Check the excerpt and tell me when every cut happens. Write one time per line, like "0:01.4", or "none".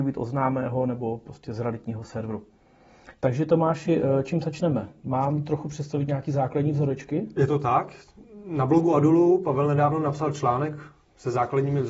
none